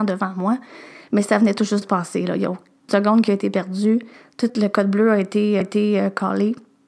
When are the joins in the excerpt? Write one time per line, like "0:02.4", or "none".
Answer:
0:01.8
0:02.9
0:04.1
0:04.5
0:05.6